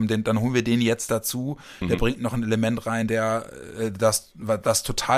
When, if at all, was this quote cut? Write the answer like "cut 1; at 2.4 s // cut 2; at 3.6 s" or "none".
none